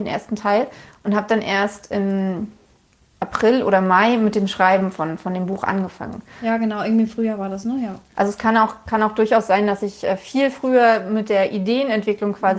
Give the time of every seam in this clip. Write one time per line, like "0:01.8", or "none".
none

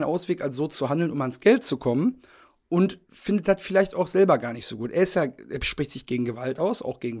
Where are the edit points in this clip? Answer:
0:03.0

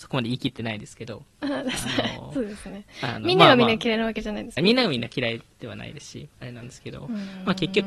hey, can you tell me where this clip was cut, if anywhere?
0:04.6

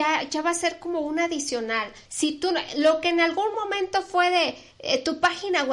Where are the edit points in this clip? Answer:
0:02.0
0:04.7

